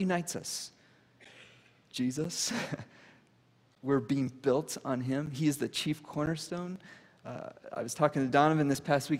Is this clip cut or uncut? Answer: uncut